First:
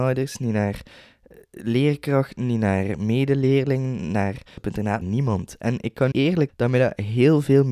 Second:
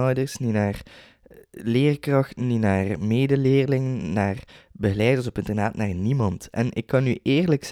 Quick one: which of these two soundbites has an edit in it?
first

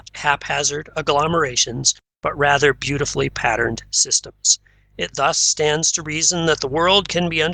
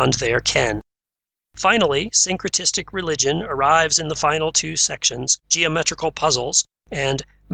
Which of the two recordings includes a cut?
second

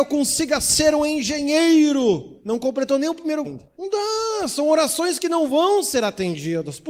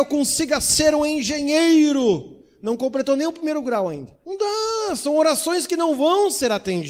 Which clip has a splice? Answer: first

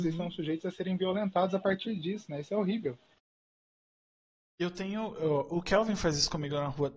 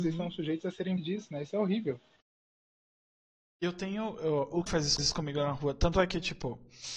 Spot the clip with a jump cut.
second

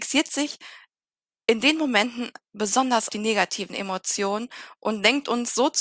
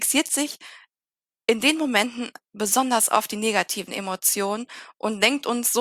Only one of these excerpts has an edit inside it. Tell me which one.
first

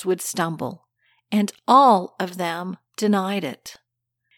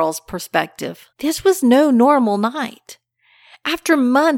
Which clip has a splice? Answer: second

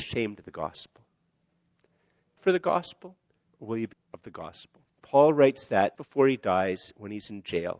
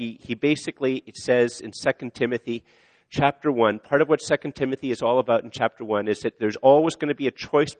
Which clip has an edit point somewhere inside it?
first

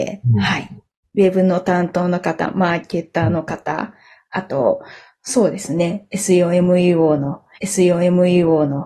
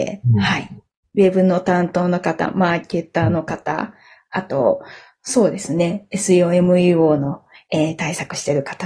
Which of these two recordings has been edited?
first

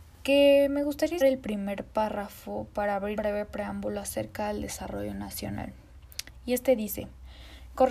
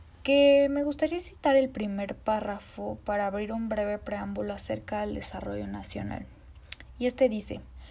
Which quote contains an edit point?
first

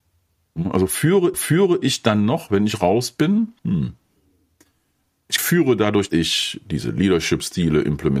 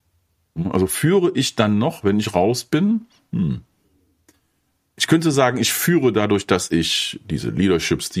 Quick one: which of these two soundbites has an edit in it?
first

